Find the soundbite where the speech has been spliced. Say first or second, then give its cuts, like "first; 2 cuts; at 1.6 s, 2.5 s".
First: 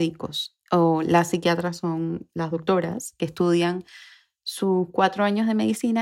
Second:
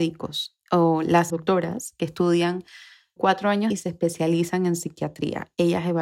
second; 3 cuts; at 1.3 s, 3.2 s, 3.7 s